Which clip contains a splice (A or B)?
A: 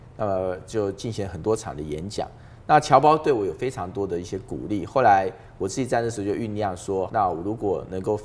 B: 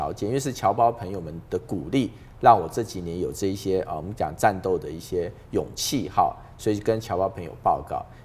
A